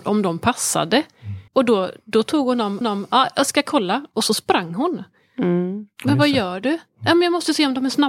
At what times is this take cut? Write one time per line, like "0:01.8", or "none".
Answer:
0:01.5
0:02.8

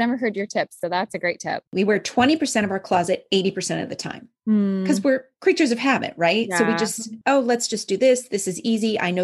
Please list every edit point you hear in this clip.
0:01.7
0:07.2

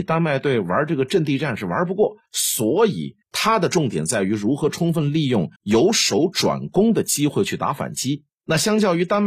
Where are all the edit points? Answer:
0:02.2
0:03.2
0:05.6
0:08.3

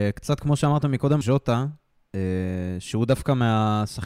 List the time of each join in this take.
0:01.2

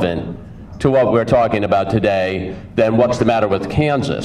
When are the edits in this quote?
none

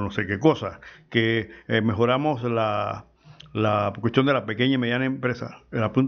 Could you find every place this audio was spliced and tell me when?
none

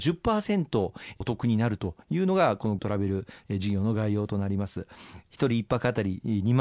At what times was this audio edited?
0:02.8

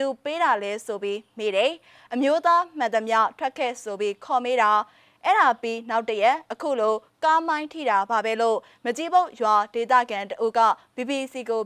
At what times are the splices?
none

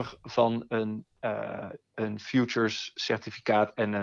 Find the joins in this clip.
none

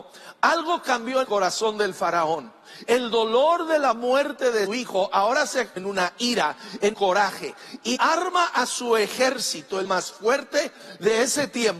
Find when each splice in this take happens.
0:01.2
0:04.7
0:05.8
0:06.9
0:08.0
0:09.8

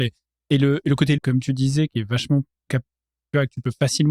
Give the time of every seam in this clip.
0:01.2

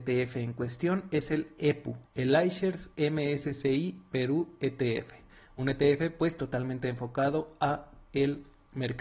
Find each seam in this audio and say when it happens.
0:02.1

